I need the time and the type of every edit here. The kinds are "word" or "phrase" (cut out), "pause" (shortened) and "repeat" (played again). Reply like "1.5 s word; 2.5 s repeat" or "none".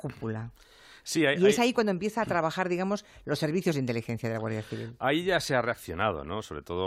none